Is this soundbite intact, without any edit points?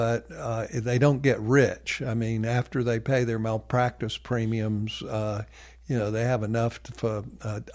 yes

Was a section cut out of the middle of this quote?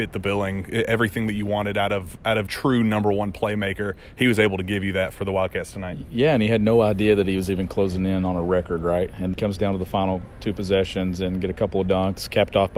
yes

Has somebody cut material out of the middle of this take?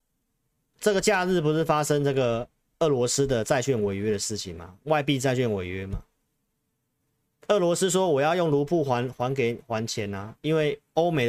no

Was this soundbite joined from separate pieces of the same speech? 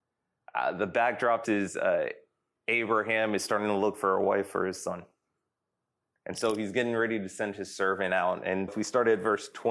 yes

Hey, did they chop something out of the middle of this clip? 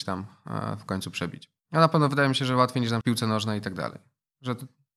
yes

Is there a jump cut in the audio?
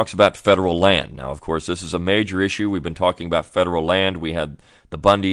no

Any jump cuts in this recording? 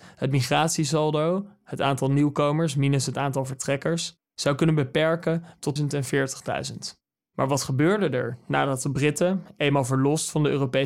yes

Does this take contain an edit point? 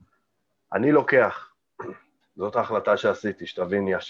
no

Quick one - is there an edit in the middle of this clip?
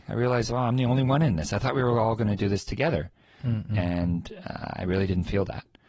no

